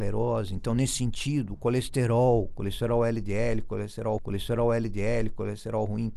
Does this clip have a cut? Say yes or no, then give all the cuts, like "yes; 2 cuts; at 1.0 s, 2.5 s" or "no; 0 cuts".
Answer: yes; 1 cut; at 4.2 s